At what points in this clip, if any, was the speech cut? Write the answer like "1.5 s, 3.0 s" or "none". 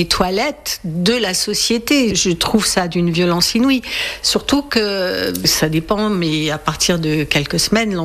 none